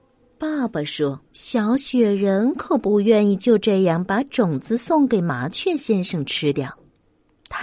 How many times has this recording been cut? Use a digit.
1